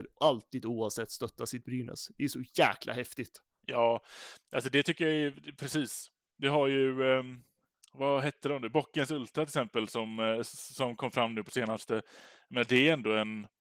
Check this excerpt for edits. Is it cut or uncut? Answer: uncut